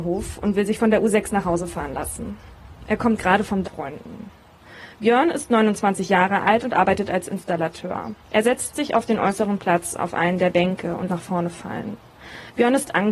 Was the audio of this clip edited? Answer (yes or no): yes